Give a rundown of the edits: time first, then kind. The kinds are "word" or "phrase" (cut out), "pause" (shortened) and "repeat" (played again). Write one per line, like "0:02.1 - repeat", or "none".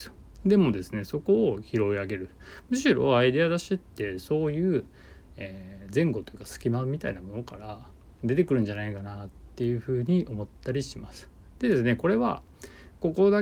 none

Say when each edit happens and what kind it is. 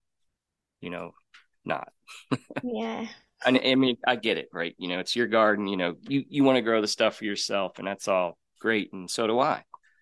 none

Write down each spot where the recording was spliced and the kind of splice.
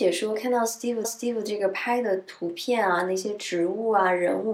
0:01.0 - repeat

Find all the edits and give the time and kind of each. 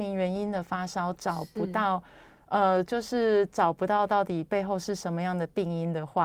none

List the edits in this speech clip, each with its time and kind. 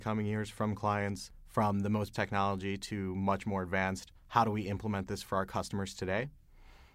0:02.1 - phrase
0:04.2 - pause

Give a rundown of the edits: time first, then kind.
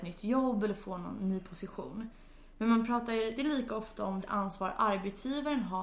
0:03.4 - word
0:04.2 - word

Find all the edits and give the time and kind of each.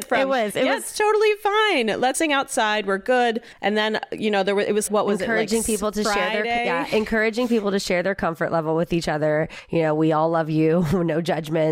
0:02.1 - word
0:04.9 - word

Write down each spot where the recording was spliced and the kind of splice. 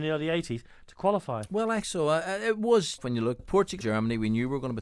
0:01.8 - word
0:03.0 - word
0:03.4 - word
0:03.8 - word

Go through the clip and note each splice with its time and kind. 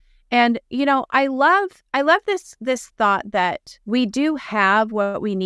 0:03.8 - pause

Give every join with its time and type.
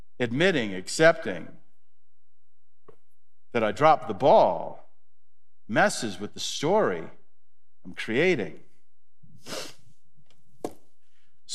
none

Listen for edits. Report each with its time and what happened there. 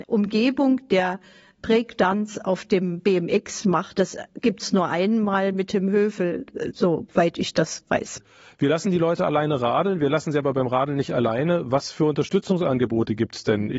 none

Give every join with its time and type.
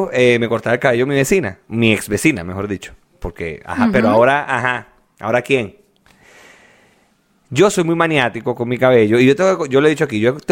none

